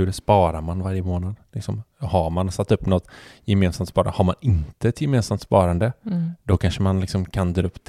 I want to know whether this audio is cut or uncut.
uncut